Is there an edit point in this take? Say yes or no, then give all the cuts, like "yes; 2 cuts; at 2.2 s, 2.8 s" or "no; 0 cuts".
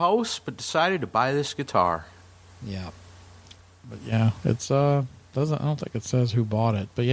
no; 0 cuts